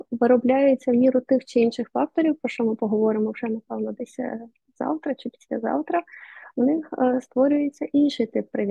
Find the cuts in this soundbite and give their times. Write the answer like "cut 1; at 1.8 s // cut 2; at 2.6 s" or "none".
none